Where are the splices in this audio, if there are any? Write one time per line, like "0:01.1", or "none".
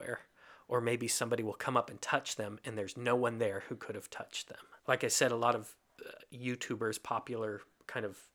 0:04.8